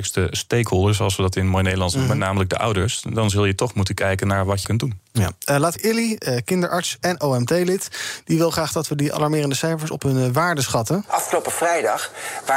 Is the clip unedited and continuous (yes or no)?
no